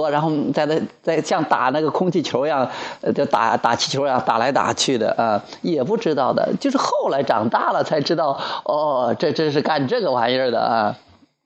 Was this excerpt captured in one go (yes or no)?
yes